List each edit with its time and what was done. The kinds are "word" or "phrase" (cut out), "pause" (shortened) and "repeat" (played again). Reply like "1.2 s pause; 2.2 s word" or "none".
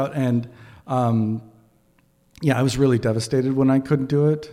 none